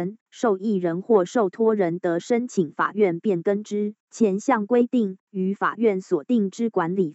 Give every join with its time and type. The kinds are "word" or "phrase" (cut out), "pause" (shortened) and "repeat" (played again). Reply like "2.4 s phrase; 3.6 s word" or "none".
4.0 s pause